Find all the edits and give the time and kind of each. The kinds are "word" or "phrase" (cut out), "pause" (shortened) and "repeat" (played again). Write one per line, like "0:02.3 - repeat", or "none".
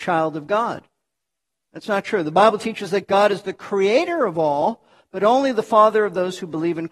none